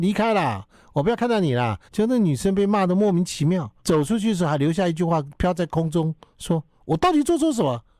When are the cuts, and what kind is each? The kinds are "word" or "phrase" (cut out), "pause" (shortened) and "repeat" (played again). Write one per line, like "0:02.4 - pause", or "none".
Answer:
0:01.9 - pause
0:03.8 - pause